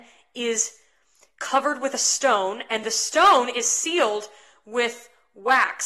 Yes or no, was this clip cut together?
no